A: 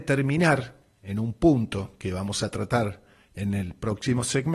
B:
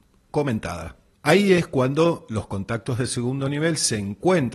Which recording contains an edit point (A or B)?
B